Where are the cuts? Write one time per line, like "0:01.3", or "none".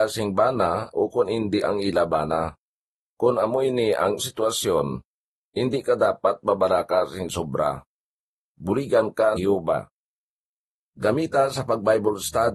0:01.6
0:04.2
0:09.4